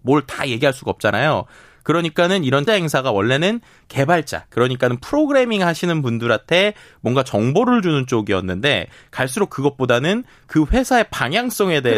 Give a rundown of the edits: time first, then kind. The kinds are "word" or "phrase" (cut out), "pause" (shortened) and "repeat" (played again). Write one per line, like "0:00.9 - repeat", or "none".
0:02.7 - word